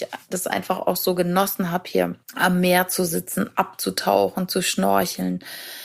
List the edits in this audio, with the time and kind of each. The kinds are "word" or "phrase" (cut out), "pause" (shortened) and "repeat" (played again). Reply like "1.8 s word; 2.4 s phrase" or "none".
2.2 s pause